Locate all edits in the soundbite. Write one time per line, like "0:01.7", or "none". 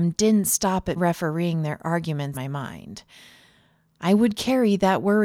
0:01.0
0:02.3